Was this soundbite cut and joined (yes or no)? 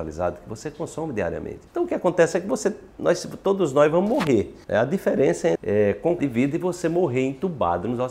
yes